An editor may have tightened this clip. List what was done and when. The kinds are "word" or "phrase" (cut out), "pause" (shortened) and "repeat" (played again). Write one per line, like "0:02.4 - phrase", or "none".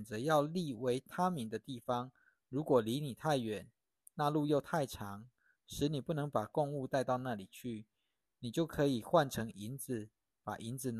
none